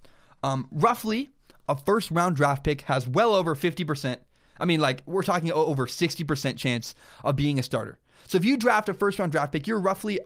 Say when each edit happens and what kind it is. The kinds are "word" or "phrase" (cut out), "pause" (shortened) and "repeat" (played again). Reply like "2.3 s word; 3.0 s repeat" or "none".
none